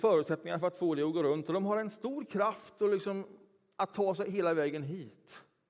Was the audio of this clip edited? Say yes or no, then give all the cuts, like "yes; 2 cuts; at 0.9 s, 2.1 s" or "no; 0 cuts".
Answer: no; 0 cuts